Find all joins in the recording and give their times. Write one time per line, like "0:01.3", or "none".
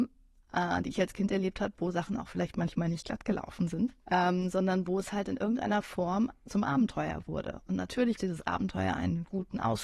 0:04.0
0:08.2

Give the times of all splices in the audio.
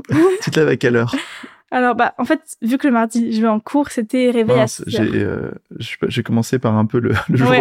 none

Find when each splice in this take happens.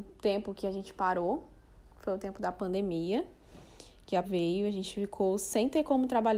0:04.2

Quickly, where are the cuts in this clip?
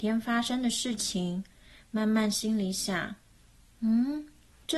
none

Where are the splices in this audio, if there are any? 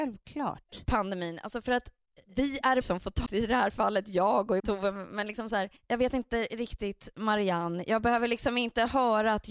0:02.8
0:03.3
0:04.6
0:05.8

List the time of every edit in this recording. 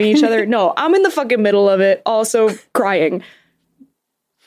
none

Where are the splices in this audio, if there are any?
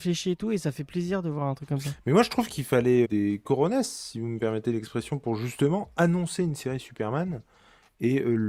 0:03.0

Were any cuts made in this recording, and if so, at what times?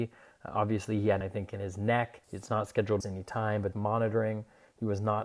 0:01.2
0:02.2
0:03.0
0:03.7

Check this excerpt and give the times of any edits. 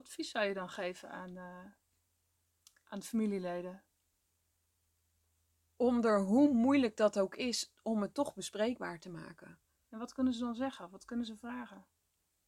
none

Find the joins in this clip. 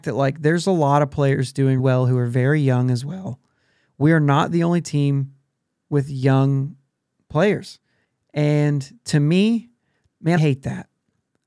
0:01.8
0:10.4

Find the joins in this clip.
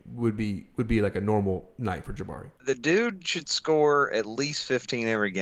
0:02.6

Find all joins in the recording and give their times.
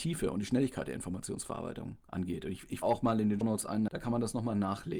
0:02.8
0:03.4
0:03.9

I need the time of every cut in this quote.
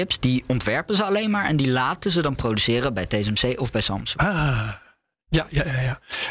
none

